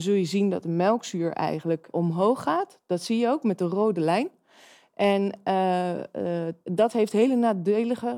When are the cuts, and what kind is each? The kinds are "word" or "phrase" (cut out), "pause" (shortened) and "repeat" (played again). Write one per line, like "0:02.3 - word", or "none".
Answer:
0:01.9 - word
0:06.6 - pause

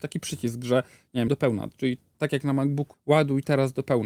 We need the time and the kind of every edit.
0:01.3 - word
0:02.9 - word

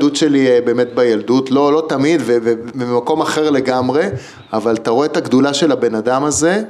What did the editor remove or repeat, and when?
none

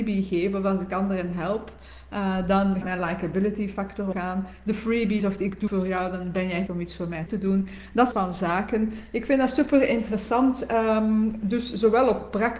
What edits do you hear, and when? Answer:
0:02.8 - word
0:04.1 - word
0:05.2 - word
0:05.7 - word
0:06.7 - word
0:07.3 - word
0:08.1 - word

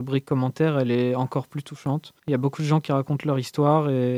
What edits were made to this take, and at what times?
0:02.2 - pause

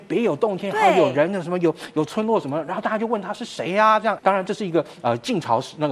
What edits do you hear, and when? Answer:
0:04.2 - word

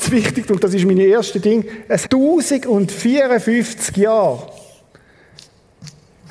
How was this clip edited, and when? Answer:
0:02.0 - word

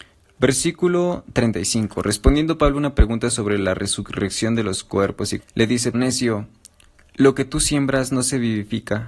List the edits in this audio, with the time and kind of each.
0:05.4 - phrase
0:05.9 - word

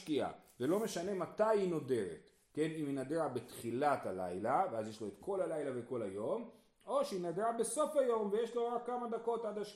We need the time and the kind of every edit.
none

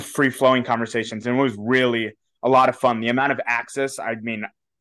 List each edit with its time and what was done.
none

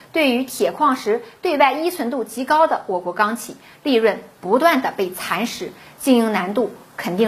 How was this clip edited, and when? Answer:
none

